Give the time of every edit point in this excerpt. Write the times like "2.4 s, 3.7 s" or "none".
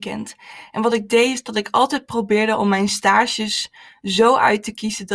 none